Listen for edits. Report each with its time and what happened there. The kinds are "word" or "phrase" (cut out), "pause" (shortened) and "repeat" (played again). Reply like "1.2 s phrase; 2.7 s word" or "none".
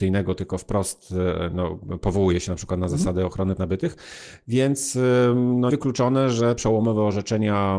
3.6 s word; 5.7 s word; 6.6 s word

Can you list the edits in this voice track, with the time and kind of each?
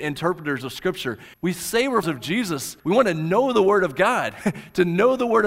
1.3 s pause; 2.0 s word; 2.8 s pause

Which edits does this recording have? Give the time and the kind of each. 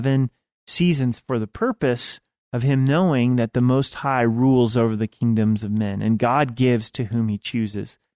none

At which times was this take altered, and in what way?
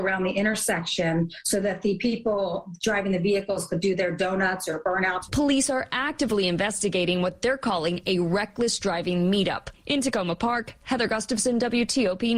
none

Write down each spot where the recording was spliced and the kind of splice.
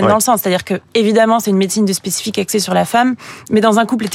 none

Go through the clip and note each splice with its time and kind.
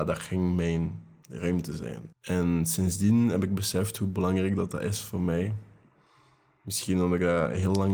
2.1 s pause

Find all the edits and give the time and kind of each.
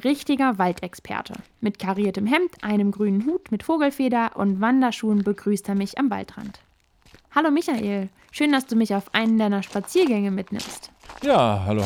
none

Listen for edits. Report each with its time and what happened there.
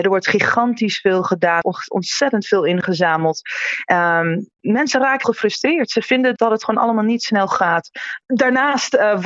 1.6 s word; 4.6 s word; 5.2 s word; 6.4 s word; 7.5 s word

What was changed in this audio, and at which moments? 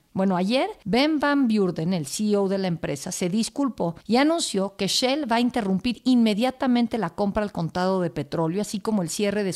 none

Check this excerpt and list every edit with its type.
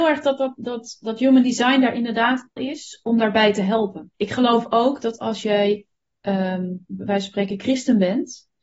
2.6 s phrase; 4.1 s pause; 6.9 s word

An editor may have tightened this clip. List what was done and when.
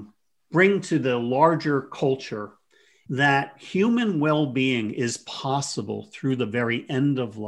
3.1 s word

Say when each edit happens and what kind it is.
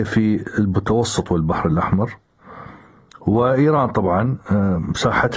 none

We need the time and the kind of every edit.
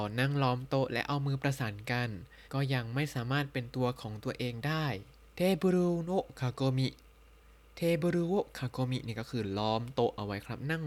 2.4 s pause; 5.2 s pause

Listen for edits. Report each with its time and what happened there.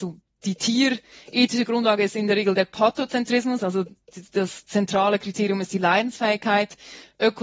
none

